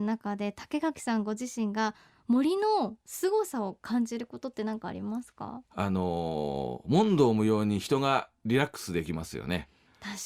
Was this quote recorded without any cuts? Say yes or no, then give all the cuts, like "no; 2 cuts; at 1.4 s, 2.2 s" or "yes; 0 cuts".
no; 1 cut; at 5.7 s